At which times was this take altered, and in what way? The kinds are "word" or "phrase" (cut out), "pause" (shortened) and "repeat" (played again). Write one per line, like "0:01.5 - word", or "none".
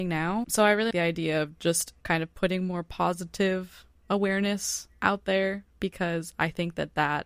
0:00.9 - word